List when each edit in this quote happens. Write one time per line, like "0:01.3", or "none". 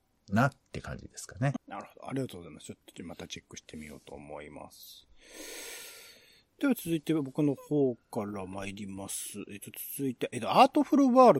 0:01.6